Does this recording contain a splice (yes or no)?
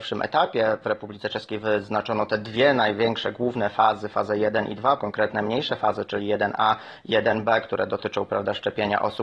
yes